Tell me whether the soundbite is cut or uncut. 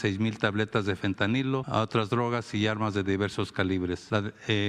uncut